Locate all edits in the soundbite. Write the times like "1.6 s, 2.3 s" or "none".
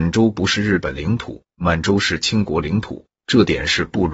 1.5 s, 3.2 s